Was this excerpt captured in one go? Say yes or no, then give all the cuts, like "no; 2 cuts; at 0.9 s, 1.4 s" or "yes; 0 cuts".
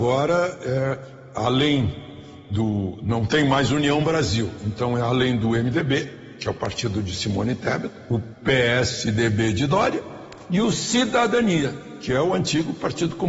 no; 1 cut; at 1.3 s